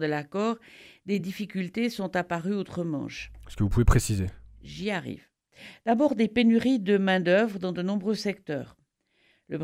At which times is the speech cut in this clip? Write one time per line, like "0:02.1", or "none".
none